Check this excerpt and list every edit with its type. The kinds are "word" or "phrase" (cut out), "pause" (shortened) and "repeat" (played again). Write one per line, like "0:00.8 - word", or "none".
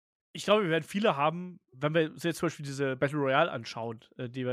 0:01.7 - word